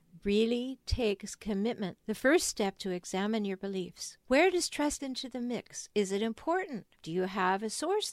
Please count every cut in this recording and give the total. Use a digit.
5